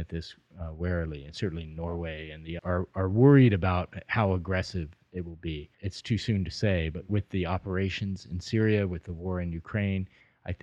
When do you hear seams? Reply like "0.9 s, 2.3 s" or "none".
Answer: 2.6 s, 5.7 s